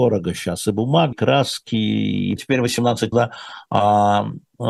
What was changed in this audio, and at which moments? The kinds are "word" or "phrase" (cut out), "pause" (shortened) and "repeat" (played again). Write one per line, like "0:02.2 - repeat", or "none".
0:01.1 - word
0:02.4 - word
0:03.1 - word